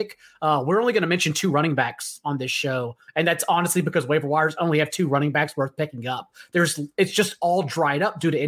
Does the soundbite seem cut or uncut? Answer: uncut